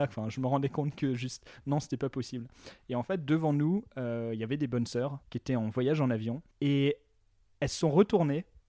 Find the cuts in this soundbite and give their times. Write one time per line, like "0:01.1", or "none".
0:05.2
0:06.5